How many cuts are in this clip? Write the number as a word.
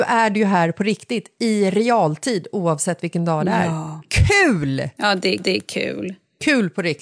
one